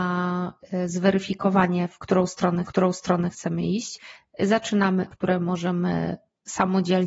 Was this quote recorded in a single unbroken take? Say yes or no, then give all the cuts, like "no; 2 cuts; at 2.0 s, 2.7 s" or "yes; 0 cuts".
no; 2 cuts; at 2.6 s, 5.1 s